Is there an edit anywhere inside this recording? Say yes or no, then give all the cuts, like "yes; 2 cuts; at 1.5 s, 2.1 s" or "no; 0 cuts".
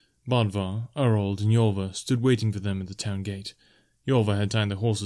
no; 0 cuts